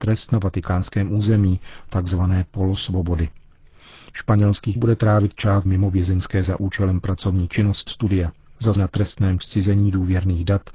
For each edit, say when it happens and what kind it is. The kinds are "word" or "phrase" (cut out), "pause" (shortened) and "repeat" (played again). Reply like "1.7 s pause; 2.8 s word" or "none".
1.9 s word; 4.8 s word; 5.7 s word; 6.4 s word; 7.9 s word; 8.8 s word; 9.4 s word